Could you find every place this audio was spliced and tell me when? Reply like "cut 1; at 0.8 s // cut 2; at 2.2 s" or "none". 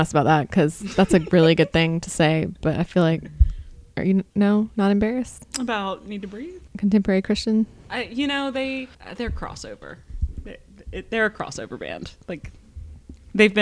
cut 1; at 3.9 s // cut 2; at 4.3 s // cut 3; at 6.7 s // cut 4; at 8.9 s